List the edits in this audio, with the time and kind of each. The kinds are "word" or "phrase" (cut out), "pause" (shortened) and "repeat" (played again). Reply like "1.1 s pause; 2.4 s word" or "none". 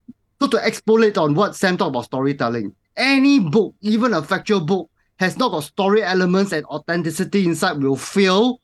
2.8 s pause